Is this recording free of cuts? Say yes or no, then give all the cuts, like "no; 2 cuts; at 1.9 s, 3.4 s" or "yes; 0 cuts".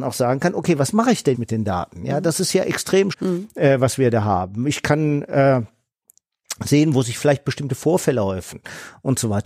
no; 2 cuts; at 1.3 s, 3.1 s